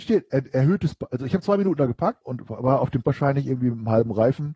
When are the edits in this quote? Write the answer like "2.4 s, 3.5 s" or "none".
2.2 s, 3.0 s